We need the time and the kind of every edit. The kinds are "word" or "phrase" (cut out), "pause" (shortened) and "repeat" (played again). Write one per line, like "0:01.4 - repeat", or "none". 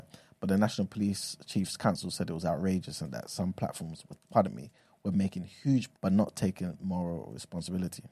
0:04.2 - word
0:05.9 - word